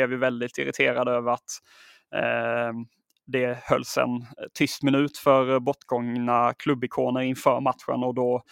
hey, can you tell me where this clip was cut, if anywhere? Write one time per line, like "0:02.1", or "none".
none